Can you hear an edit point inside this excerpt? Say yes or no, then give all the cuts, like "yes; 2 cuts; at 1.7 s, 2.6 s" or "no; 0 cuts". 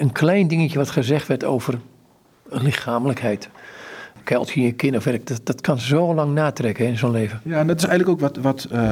no; 0 cuts